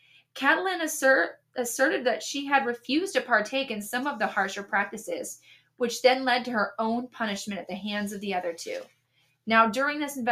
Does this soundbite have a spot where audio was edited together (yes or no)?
no